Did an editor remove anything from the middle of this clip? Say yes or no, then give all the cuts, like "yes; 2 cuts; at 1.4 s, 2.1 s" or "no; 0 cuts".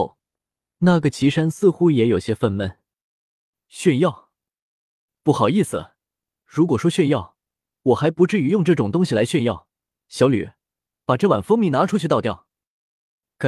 no; 0 cuts